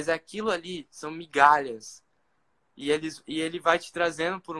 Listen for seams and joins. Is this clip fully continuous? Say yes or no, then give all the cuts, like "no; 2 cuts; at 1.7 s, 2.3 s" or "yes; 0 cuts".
yes; 0 cuts